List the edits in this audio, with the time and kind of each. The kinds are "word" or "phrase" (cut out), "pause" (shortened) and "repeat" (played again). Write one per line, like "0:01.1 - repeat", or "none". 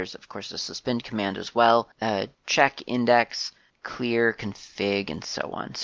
0:02.3 - pause
0:03.7 - pause